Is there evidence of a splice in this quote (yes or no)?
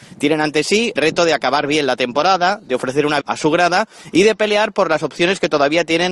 yes